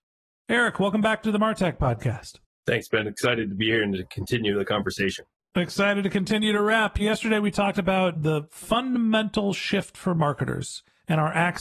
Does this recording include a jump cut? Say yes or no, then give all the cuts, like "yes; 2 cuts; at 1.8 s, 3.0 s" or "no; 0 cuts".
no; 0 cuts